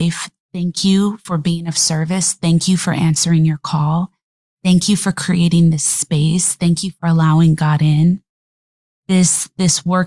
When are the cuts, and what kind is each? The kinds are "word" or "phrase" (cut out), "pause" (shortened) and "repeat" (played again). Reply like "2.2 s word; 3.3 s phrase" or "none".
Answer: none